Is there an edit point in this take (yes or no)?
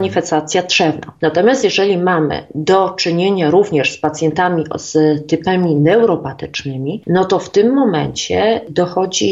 no